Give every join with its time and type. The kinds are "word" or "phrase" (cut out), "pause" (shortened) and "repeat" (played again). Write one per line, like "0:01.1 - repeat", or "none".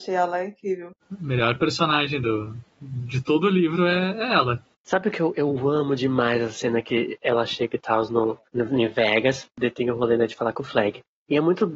0:01.0 - pause
0:04.7 - pause
0:08.5 - pause